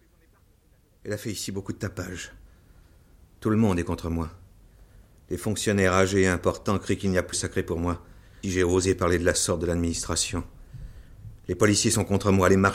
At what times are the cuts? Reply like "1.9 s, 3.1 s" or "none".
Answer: 7.3 s, 8.4 s